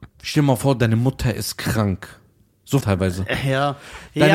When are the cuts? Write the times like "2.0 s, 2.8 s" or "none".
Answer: 2.8 s

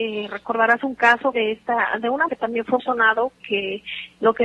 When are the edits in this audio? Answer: 1.3 s, 2.3 s, 2.8 s, 3.4 s

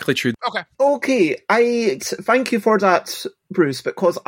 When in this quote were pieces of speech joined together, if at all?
2.0 s

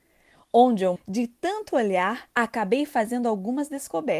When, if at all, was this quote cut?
1.0 s, 2.3 s

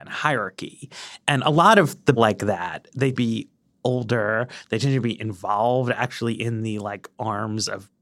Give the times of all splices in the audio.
2.2 s, 3.1 s

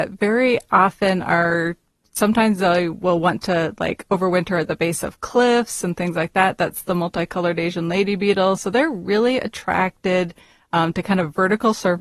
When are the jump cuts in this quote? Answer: none

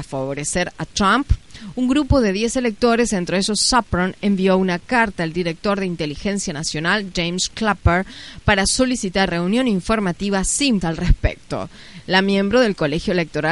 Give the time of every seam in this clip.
9.3 s, 10.8 s

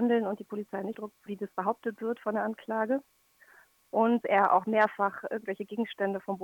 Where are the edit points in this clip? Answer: 0.9 s, 1.3 s, 4.2 s

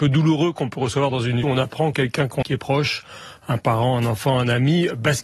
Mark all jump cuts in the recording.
1.4 s, 1.9 s, 2.4 s

